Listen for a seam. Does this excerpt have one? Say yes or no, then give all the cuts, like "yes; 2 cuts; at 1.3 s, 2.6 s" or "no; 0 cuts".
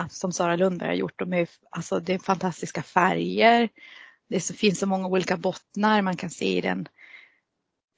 no; 0 cuts